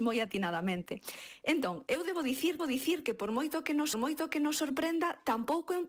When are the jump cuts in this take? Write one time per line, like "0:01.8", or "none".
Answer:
0:02.6
0:03.9